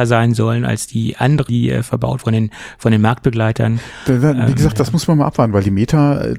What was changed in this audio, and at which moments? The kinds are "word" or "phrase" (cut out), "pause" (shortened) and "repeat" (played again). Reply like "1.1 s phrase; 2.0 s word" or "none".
1.5 s word; 2.2 s word